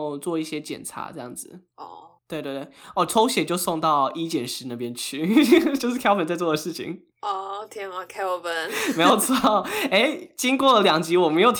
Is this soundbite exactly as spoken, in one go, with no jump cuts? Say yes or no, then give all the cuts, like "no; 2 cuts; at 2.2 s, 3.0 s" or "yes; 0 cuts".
no; 3 cuts; at 1.7 s, 2.2 s, 7.1 s